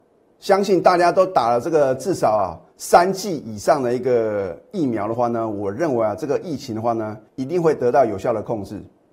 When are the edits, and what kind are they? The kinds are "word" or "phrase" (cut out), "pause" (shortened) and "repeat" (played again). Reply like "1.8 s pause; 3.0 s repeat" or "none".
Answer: 2.7 s pause; 7.3 s pause